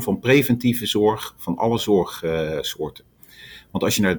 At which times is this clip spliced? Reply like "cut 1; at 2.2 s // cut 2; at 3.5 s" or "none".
none